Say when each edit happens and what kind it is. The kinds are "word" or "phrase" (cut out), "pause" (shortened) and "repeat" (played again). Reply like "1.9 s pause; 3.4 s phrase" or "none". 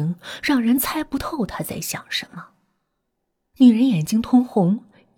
none